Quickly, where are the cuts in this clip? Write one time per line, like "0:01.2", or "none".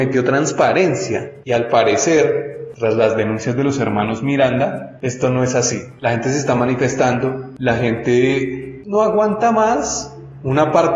none